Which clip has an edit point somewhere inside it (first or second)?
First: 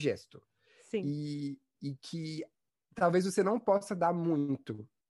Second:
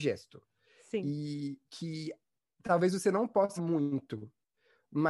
second